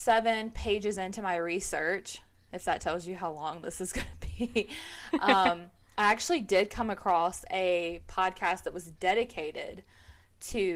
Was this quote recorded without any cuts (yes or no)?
yes